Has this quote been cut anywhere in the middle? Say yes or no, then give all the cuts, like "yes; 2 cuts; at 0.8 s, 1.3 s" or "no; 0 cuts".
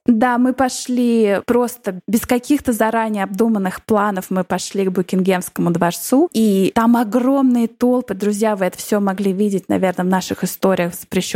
no; 0 cuts